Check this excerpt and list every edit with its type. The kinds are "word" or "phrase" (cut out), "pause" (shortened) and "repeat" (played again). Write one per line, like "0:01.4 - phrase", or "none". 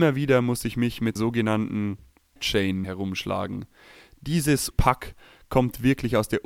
0:01.2 - word
0:02.4 - word
0:02.8 - word
0:04.7 - word